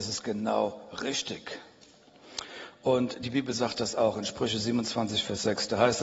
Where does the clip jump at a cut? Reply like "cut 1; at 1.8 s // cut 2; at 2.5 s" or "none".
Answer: none